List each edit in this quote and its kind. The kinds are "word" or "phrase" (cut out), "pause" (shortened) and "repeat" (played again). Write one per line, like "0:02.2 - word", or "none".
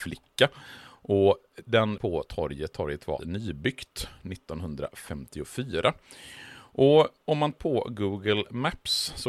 0:02.0 - word
0:02.7 - word
0:03.2 - word
0:07.5 - word

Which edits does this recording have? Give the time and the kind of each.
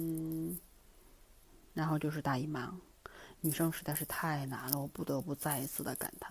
0:01.4 - pause

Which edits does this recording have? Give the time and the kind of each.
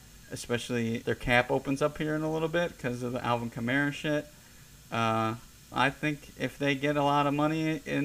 0:01.0 - word
0:05.7 - word

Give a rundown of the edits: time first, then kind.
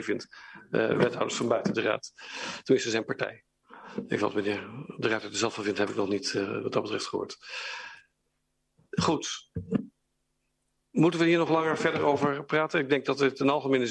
none

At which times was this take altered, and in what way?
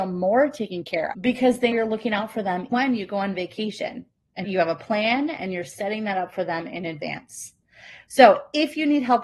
0:01.1 - word
0:01.7 - word
0:02.7 - word
0:04.4 - word

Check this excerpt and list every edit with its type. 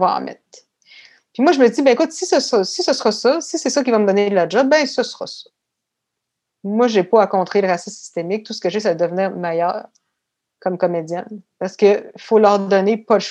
none

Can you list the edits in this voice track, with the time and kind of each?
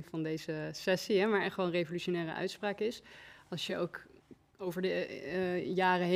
none

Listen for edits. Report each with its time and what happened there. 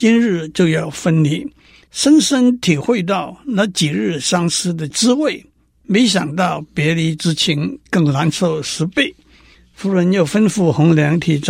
none

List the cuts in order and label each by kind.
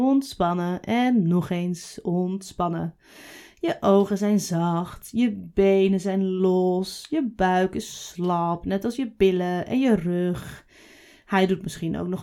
none

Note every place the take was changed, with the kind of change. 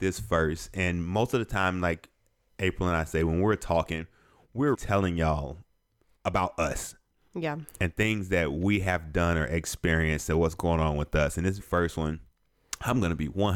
0:04.7 - word
0:11.6 - word

